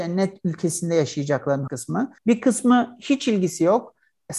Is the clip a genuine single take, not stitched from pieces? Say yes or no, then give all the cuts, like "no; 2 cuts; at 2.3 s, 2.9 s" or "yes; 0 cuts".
no; 2 cuts; at 1.7 s, 2.2 s